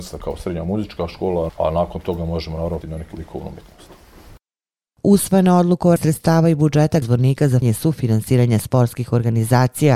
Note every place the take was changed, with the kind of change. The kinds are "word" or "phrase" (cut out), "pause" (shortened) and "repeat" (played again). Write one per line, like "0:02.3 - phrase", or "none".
0:01.5 - word
0:02.8 - word
0:03.1 - word
0:06.0 - word
0:07.0 - word
0:07.6 - word